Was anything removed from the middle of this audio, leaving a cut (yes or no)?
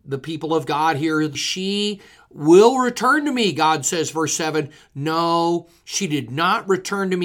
yes